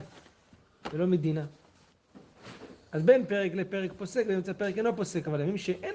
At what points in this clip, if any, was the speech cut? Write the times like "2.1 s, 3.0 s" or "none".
none